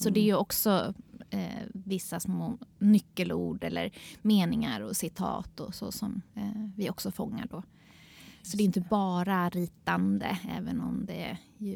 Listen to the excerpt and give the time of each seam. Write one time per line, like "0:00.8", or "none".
0:06.3